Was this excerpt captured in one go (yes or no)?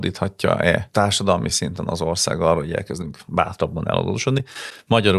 yes